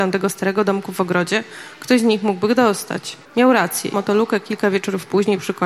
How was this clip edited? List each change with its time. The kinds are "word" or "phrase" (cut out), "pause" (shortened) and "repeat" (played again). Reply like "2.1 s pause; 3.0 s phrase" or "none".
3.2 s pause; 3.9 s phrase